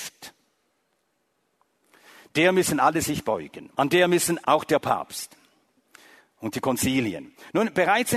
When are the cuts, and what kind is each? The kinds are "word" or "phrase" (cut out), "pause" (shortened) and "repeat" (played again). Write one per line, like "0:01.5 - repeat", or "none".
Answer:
0:03.7 - pause
0:04.4 - phrase